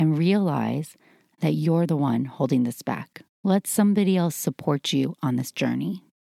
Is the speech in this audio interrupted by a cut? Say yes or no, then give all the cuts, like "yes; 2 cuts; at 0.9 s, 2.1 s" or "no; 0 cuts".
no; 0 cuts